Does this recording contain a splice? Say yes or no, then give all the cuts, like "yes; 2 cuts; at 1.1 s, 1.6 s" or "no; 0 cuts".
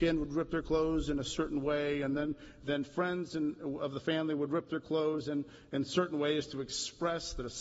no; 0 cuts